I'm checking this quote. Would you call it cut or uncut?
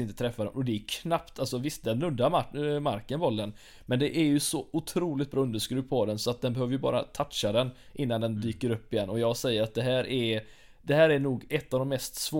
uncut